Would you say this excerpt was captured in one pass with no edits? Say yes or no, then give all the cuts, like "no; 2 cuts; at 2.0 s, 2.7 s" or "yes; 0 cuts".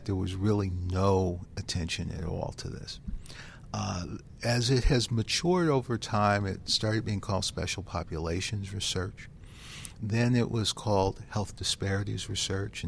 yes; 0 cuts